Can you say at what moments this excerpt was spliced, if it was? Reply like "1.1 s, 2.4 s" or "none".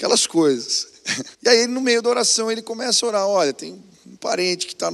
1.3 s